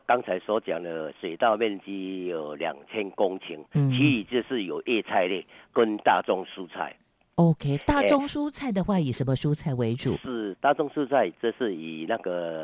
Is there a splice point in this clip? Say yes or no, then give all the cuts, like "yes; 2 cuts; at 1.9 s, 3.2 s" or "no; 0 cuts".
no; 0 cuts